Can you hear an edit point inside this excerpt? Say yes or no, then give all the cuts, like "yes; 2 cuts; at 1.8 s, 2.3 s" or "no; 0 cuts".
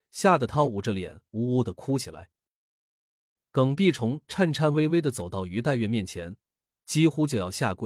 no; 0 cuts